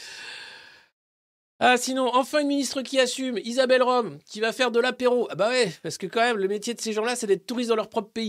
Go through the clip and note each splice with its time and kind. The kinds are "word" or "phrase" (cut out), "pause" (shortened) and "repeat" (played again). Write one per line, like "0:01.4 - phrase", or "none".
none

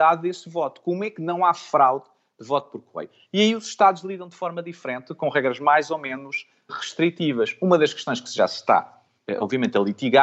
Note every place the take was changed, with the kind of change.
none

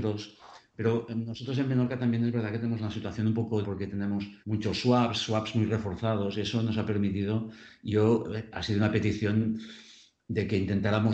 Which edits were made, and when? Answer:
0:03.6 - word
0:04.4 - pause
0:08.5 - word

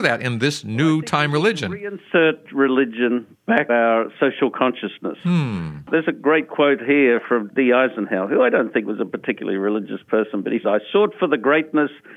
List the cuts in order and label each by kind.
0:03.7 - word
0:07.5 - word
0:10.6 - word

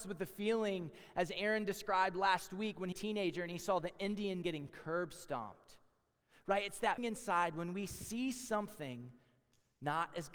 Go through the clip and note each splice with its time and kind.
0:02.9 - phrase
0:04.4 - word
0:07.0 - word

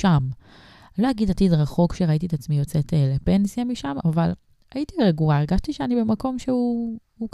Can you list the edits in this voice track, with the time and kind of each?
none

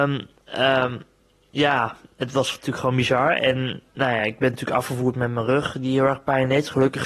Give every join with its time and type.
none

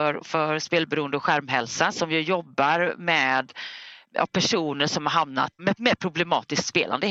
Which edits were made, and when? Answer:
0:05.6 - phrase

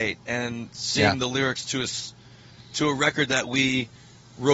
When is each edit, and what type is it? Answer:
none

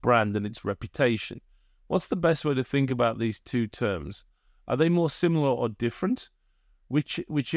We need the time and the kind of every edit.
none

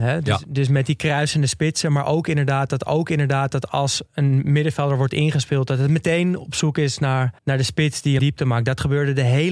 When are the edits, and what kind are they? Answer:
0:02.9 - repeat
0:07.4 - pause
0:08.2 - phrase

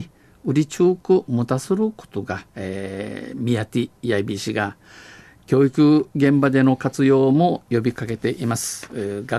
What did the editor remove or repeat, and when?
0:02.5 - pause

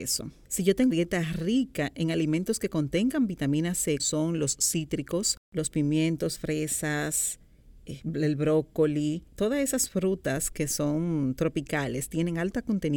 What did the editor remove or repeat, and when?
0:00.9 - word
0:04.0 - word
0:05.4 - pause
0:06.4 - word
0:09.3 - pause

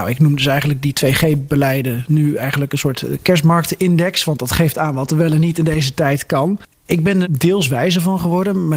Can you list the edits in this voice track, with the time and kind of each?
0:07.2 - word

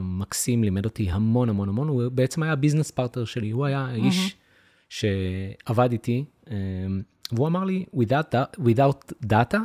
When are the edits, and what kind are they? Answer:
none

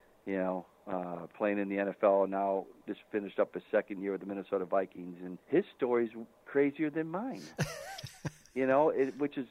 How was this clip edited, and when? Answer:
0:05.4 - pause

